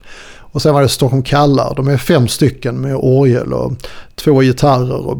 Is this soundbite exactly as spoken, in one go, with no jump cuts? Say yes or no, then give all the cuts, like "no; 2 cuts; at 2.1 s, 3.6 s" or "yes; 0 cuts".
yes; 0 cuts